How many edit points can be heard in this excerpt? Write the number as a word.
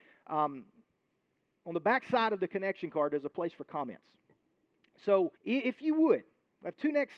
one